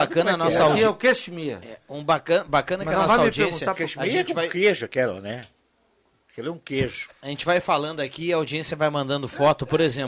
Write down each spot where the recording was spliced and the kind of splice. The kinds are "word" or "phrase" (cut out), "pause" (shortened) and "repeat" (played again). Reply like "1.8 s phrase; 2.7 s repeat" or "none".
none